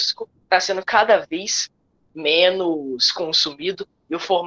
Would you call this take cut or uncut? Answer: uncut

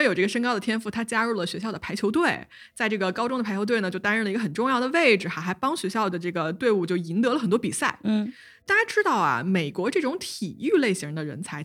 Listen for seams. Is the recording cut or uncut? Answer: uncut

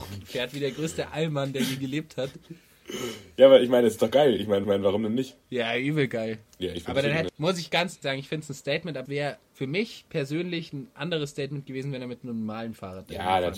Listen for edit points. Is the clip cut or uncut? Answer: cut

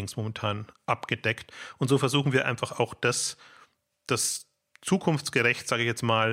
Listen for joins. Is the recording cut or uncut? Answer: uncut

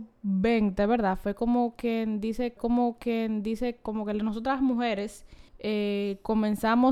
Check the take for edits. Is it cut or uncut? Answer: cut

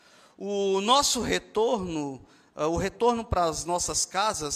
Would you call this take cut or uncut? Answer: uncut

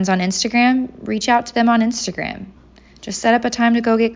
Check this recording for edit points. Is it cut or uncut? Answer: uncut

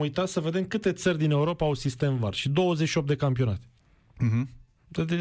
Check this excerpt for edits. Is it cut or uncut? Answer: uncut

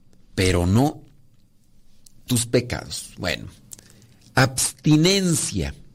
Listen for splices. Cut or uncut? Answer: uncut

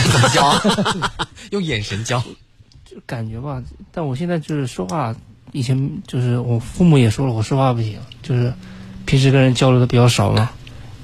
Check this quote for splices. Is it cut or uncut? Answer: uncut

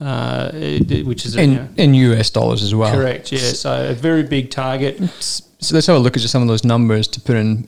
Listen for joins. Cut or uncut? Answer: cut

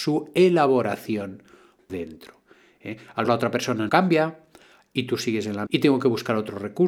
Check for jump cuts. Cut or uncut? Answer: cut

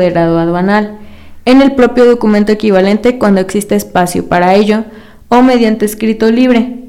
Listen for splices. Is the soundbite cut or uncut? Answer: uncut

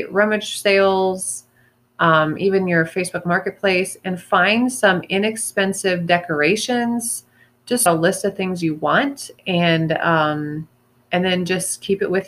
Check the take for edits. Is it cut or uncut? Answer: cut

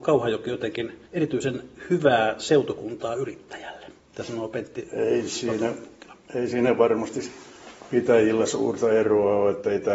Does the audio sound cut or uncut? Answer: cut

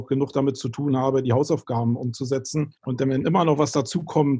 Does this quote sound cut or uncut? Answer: cut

